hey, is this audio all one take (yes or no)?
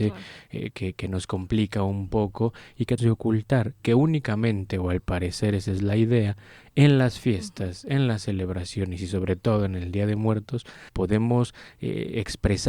no